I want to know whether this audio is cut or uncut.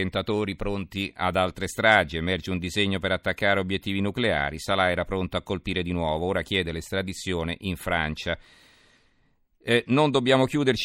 uncut